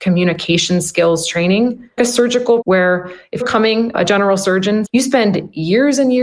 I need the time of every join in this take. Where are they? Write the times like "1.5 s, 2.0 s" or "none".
2.0 s, 2.6 s, 3.4 s, 4.8 s